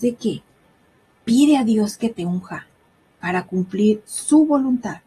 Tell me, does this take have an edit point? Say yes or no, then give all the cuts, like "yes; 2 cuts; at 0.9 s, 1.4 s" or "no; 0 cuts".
no; 0 cuts